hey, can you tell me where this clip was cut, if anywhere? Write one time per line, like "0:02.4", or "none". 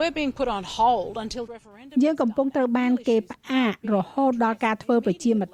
0:01.5